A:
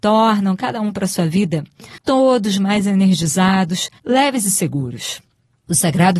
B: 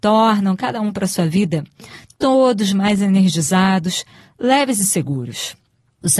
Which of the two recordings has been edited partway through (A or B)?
A